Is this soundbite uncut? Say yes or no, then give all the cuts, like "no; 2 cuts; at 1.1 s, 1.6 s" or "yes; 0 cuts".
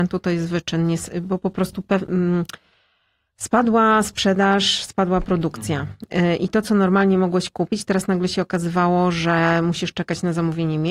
yes; 0 cuts